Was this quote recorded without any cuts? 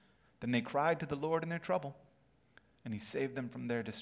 yes; 0 cuts

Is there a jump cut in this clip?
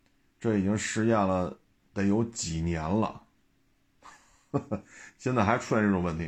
no; 0 cuts

